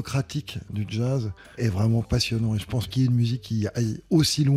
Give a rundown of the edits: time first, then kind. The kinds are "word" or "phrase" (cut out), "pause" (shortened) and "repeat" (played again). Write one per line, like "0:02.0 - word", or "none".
0:01.6 - word
0:02.9 - word